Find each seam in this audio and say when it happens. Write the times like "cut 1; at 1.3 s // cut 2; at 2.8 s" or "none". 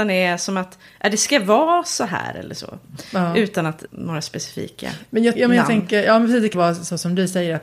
cut 1; at 3.9 s // cut 2; at 5.3 s // cut 3; at 6.5 s